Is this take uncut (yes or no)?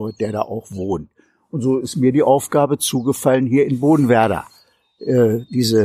yes